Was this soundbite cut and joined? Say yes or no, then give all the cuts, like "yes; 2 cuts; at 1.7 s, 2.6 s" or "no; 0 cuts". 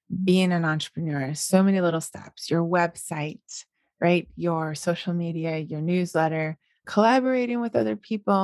no; 0 cuts